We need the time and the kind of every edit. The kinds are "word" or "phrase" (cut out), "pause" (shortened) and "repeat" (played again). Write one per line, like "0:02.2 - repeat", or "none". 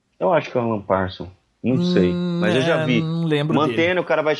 none